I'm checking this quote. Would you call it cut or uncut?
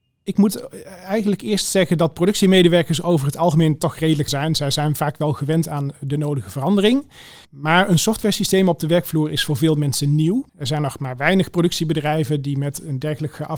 cut